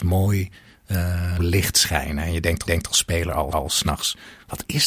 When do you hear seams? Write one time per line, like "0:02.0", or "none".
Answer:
0:01.4
0:02.7
0:03.5